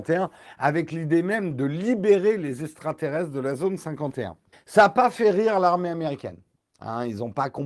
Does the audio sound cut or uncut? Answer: cut